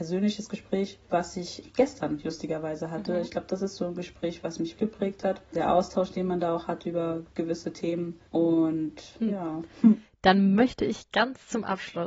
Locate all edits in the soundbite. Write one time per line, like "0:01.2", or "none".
0:04.8